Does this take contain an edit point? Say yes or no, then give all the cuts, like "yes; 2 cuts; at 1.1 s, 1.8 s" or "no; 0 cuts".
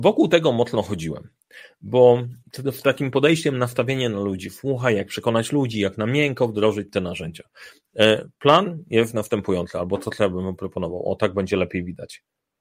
yes; 1 cut; at 2.4 s